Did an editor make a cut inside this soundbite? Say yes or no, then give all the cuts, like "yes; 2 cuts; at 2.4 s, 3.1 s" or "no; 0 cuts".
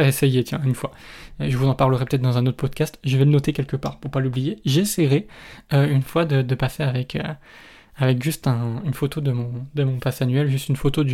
no; 0 cuts